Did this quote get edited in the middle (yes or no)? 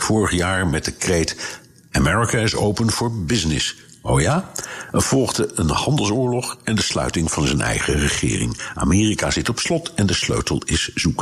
no